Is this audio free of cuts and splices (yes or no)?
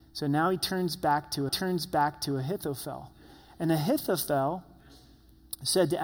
no